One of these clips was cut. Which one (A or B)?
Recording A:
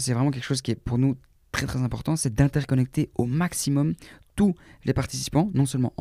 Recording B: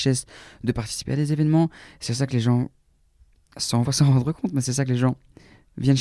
B